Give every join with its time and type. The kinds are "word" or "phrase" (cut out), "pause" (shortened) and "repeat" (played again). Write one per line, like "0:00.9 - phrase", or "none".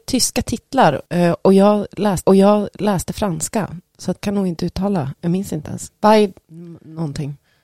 0:01.1 - pause
0:02.2 - repeat
0:04.2 - word